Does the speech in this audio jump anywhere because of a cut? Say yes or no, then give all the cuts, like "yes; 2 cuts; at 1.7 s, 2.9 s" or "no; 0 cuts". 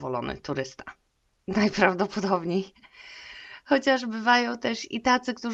no; 0 cuts